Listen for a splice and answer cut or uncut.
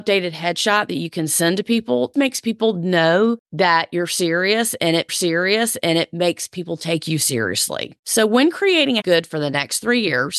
cut